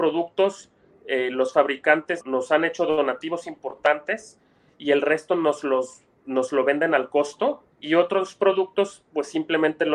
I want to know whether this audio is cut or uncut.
cut